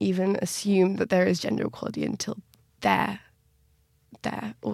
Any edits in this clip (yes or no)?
no